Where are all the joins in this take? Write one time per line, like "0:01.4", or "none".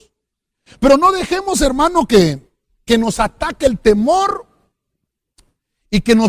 none